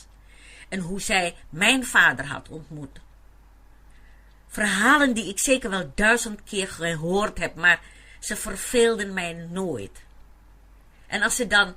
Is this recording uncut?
yes; 0 cuts

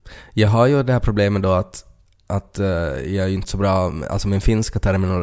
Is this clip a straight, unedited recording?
yes; 0 cuts

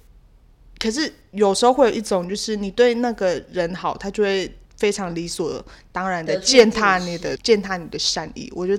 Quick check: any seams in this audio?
yes; 2 cuts; at 4.6 s, 7.4 s

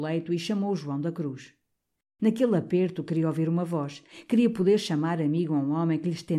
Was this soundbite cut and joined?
no; 0 cuts

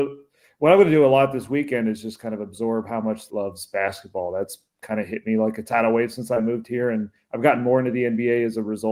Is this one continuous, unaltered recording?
no; 1 cut; at 3.3 s

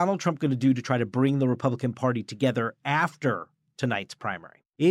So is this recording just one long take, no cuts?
yes; 0 cuts

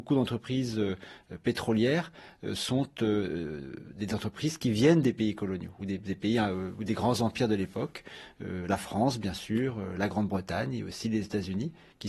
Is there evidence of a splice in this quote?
no; 0 cuts

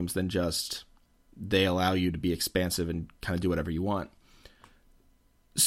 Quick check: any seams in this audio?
no; 0 cuts

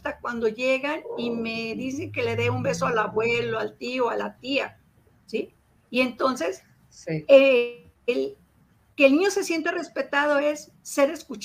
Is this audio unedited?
yes; 0 cuts

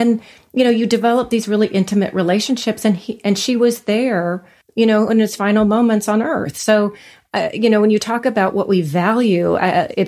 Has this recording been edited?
yes; 1 cut; at 4.6 s

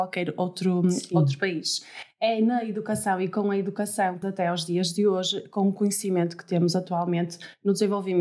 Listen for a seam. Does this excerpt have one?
yes; 1 cut; at 4.2 s

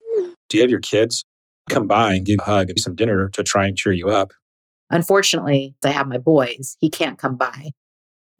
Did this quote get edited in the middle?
yes; 4 cuts; at 1.7 s, 2.4 s, 2.8 s, 5.8 s

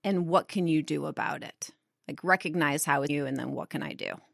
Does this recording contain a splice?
yes; 1 cut; at 3.1 s

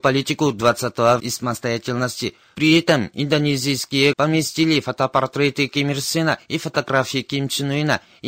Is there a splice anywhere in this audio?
yes; 2 cuts; at 1.2 s, 4.1 s

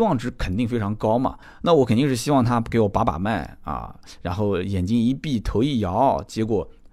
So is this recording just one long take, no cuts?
no; 1 cut; at 1.4 s

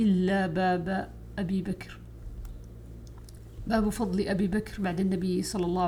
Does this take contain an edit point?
no; 0 cuts

